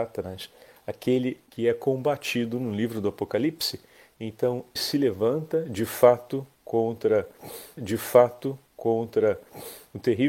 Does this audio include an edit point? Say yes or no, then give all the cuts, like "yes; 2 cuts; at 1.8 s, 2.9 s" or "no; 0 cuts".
yes; 3 cuts; at 1.5 s, 4.8 s, 7.8 s